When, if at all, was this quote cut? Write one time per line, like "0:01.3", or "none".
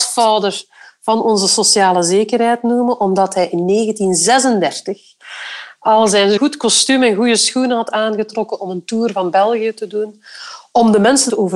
none